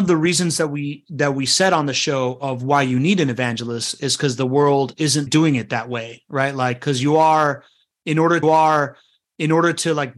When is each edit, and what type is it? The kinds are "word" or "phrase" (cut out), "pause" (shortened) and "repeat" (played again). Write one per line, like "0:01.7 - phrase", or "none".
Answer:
0:05.3 - word
0:08.4 - repeat